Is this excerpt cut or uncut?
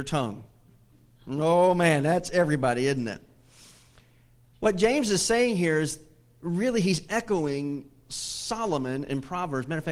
uncut